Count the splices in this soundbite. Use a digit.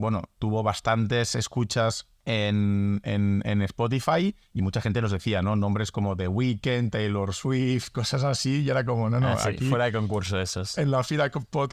2